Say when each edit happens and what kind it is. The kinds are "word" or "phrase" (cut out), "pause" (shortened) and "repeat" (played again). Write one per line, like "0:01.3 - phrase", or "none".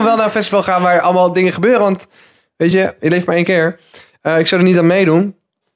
none